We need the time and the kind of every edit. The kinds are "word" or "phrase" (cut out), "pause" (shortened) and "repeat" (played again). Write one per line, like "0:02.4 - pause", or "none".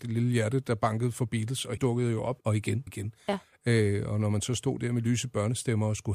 0:01.8 - word
0:02.4 - word
0:02.9 - word